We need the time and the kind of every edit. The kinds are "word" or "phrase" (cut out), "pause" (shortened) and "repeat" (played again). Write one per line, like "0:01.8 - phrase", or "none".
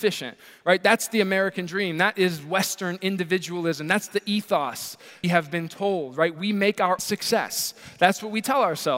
0:05.2 - phrase
0:07.0 - word